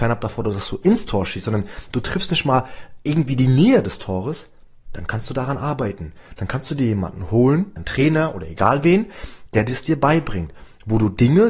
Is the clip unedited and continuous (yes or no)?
no